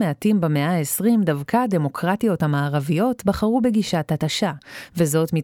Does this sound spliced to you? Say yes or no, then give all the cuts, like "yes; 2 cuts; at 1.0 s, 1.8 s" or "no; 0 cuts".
no; 0 cuts